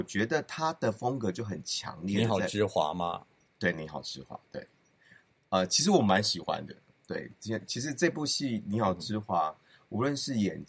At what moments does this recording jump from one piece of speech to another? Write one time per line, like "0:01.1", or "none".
none